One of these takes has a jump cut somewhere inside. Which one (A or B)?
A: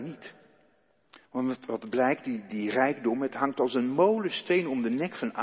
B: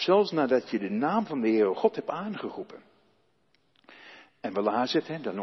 A